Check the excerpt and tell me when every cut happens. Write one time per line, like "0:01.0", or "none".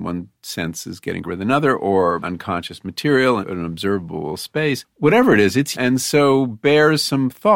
0:01.2
0:02.2
0:03.4
0:05.7